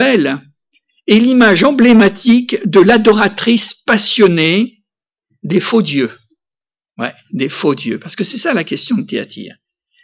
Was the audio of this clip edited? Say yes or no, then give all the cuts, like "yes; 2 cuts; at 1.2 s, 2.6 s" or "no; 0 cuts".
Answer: no; 0 cuts